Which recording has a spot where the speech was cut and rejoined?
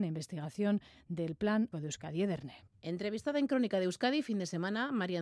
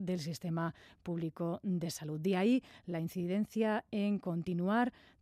first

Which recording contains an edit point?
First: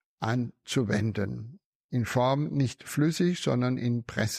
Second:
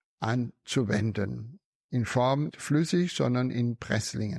second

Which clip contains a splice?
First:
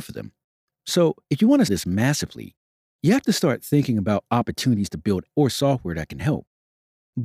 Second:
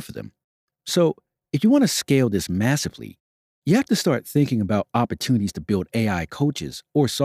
first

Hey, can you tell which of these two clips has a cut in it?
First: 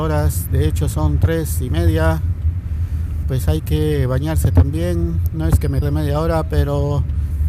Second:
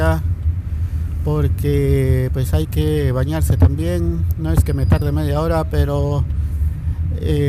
first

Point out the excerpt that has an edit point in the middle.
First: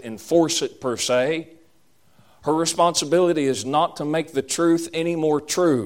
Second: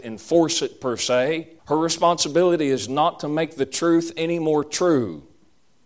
second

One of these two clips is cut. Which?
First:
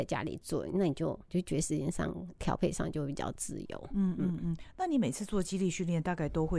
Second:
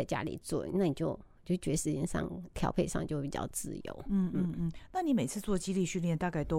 first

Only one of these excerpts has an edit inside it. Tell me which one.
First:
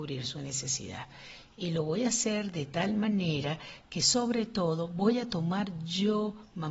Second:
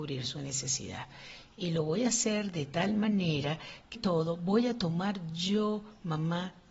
second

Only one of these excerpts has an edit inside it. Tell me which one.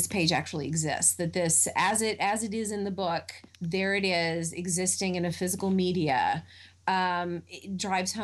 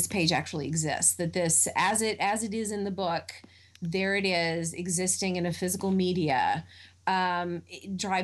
first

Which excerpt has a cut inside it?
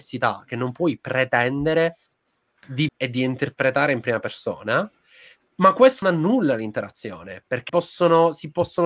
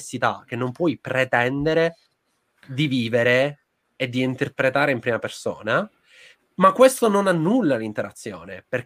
first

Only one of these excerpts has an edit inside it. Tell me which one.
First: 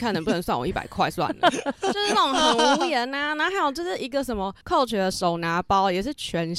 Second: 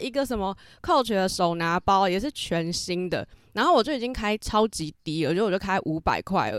first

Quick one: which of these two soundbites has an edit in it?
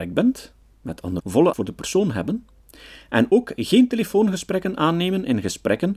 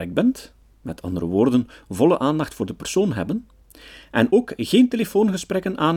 first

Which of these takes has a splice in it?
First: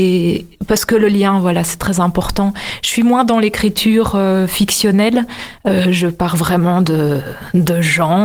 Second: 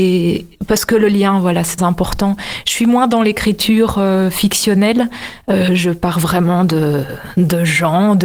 second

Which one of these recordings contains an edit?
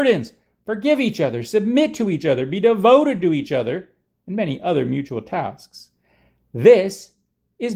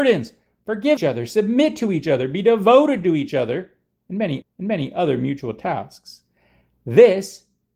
second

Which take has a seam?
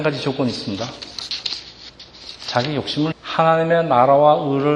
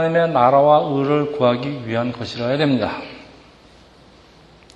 first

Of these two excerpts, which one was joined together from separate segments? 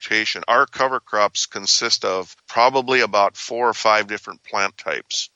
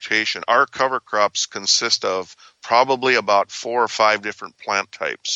first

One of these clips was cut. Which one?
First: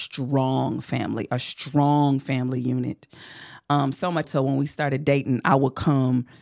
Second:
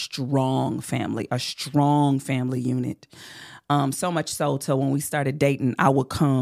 first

